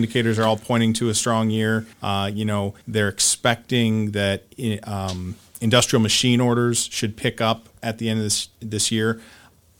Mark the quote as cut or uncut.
cut